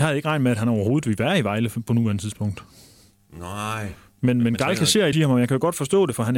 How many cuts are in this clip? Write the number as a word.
one